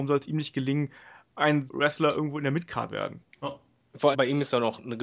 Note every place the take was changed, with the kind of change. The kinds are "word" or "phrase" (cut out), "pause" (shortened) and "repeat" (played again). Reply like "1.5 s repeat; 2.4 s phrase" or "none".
1.7 s word; 2.9 s word; 4.1 s word